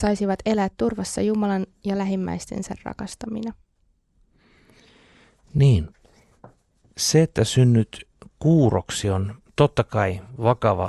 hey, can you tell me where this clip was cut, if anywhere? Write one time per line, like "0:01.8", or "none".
none